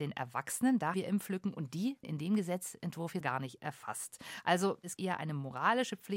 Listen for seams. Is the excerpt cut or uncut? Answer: cut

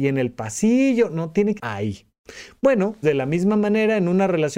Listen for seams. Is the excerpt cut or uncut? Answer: cut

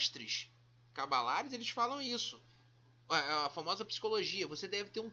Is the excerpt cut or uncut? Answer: uncut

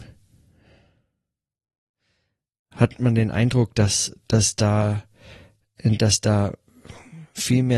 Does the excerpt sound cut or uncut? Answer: cut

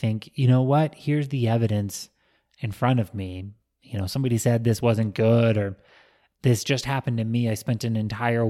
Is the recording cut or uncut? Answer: uncut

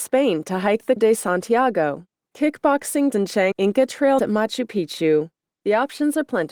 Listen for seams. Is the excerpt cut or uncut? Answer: cut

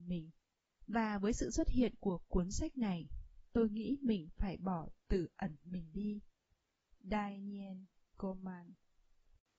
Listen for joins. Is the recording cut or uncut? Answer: uncut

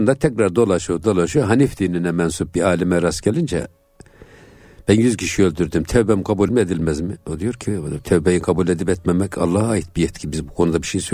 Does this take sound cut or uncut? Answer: cut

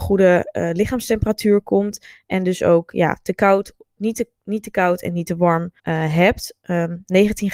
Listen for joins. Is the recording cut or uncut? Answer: cut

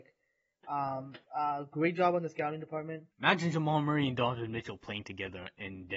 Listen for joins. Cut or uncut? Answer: cut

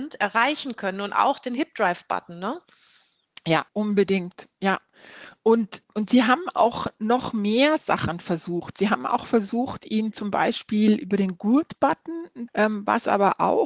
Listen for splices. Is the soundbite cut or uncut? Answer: cut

